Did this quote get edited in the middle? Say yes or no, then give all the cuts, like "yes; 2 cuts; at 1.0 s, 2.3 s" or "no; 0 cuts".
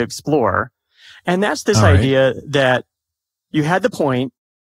no; 0 cuts